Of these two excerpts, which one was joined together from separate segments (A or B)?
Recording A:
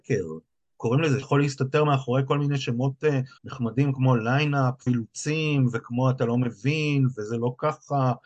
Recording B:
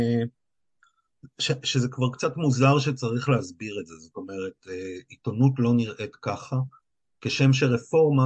A